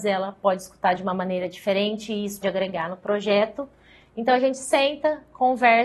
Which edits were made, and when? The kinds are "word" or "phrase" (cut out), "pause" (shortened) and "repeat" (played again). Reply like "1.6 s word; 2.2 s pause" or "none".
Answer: 2.4 s word